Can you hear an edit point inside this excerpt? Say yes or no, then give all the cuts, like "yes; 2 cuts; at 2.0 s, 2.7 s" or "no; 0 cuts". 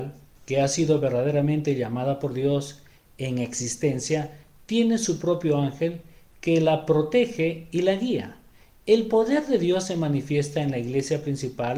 no; 0 cuts